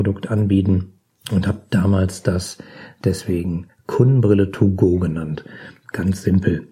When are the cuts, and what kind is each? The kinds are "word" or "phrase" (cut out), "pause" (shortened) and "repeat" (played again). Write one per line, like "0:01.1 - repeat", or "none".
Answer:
0:01.0 - pause